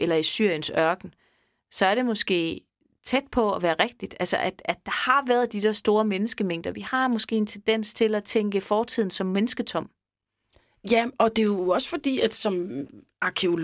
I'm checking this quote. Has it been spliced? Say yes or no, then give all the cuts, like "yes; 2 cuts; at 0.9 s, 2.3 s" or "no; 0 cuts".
no; 0 cuts